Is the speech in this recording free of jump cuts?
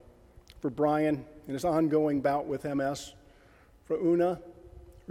yes; 0 cuts

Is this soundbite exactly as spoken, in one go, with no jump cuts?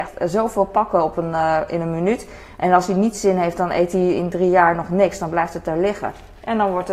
yes; 0 cuts

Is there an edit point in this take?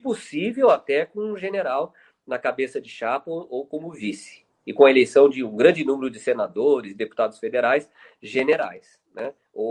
no; 0 cuts

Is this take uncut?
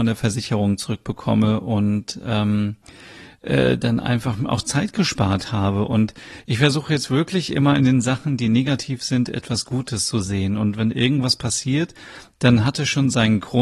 yes; 0 cuts

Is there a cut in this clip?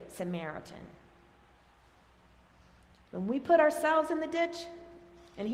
no; 0 cuts

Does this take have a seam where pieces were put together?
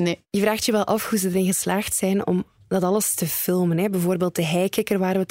no; 0 cuts

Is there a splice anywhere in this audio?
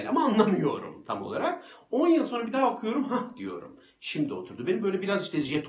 no; 0 cuts

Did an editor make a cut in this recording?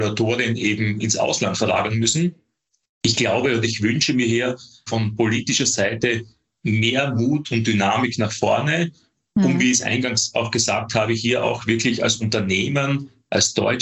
yes; 1 cut; at 4.9 s

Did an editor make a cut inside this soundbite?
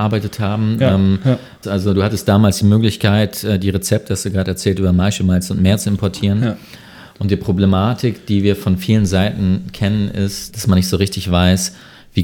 no; 0 cuts

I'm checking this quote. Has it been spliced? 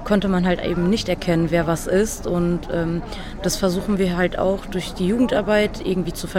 no; 0 cuts

